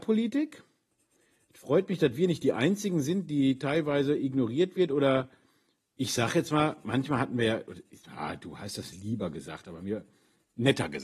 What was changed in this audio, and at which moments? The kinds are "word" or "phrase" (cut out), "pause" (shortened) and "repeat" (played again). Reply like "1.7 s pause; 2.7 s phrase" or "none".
none